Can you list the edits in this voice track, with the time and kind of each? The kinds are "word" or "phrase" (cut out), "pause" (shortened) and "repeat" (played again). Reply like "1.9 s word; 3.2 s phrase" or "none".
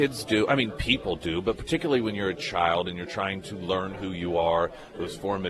none